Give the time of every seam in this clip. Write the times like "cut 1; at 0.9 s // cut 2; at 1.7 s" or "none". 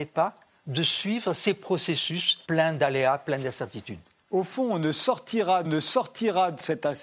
cut 1; at 2.4 s // cut 2; at 4.1 s // cut 3; at 5.6 s